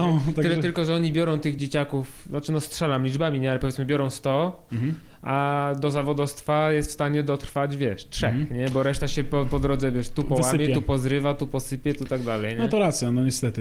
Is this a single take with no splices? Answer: yes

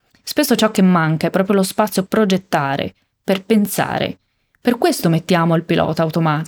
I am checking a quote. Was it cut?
yes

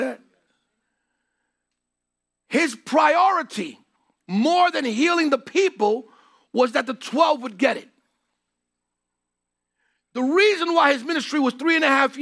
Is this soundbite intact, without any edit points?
yes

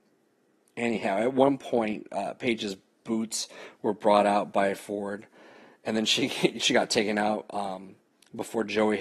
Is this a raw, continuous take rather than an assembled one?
yes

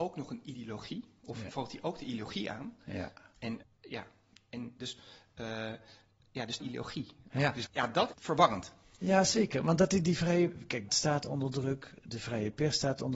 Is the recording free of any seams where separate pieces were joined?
no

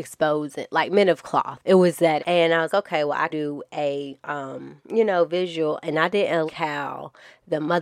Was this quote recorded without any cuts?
no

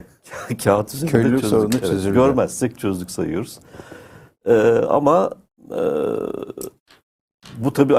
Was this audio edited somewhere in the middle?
no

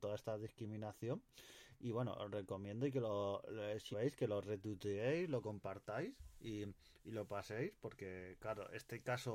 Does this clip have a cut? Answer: yes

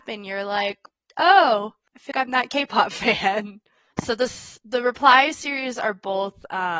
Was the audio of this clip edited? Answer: yes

